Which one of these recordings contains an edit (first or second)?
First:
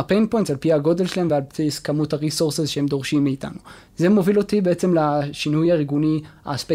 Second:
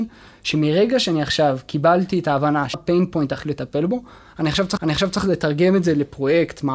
second